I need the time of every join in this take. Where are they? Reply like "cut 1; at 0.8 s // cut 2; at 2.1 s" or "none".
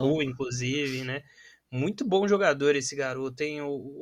none